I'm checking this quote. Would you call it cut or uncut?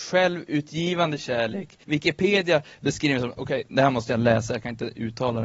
cut